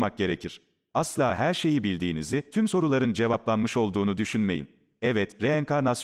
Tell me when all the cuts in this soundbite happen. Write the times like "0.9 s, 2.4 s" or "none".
none